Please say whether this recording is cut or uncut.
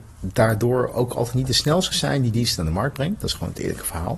uncut